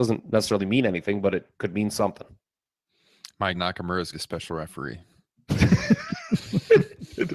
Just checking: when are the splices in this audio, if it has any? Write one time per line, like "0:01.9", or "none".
0:01.5
0:03.5
0:04.1